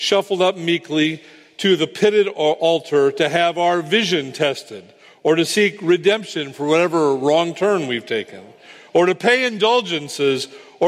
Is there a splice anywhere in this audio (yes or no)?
no